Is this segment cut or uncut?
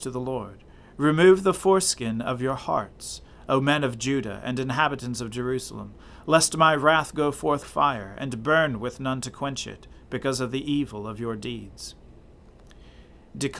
cut